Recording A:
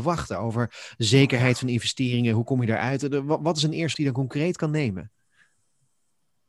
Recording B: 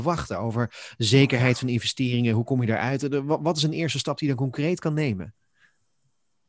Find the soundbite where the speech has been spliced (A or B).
A